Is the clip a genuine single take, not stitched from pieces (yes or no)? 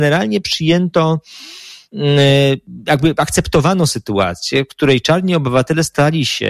yes